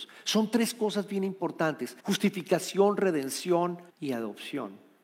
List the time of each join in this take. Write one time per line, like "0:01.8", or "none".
0:02.0
0:03.9